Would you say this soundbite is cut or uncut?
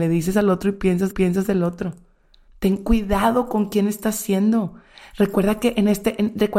cut